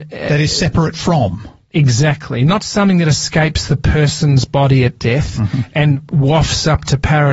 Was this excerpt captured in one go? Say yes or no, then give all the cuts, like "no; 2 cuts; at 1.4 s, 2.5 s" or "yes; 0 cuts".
yes; 0 cuts